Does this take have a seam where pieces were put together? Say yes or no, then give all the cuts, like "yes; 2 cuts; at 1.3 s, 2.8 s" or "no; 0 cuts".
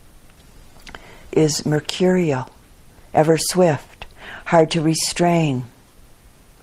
yes; 1 cut; at 1.3 s